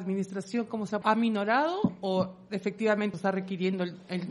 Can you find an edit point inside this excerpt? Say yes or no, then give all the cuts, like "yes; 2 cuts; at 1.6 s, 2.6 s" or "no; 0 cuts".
yes; 2 cuts; at 1.0 s, 3.1 s